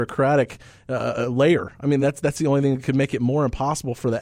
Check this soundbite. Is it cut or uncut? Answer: uncut